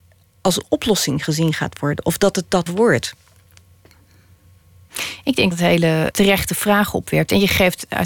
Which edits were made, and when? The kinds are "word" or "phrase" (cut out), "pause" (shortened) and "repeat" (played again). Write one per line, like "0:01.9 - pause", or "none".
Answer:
0:02.7 - word
0:05.5 - word
0:06.1 - word